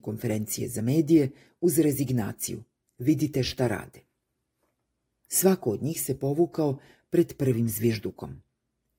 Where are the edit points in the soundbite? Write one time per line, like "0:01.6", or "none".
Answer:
none

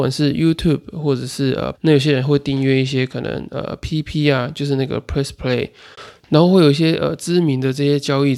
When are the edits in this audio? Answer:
0:01.7

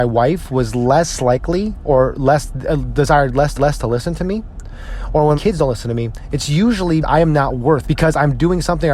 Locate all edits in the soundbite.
0:03.6
0:05.4
0:07.0
0:07.8

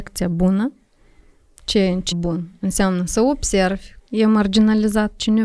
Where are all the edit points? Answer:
0:02.1
0:04.0

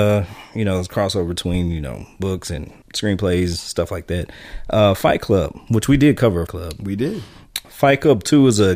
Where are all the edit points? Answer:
0:02.8
0:06.5

